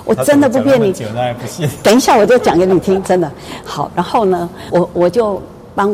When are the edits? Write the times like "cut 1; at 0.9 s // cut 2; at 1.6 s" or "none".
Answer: cut 1; at 4.7 s